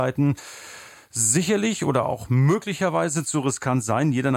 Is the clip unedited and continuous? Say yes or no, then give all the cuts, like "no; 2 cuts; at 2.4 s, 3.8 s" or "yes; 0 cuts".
yes; 0 cuts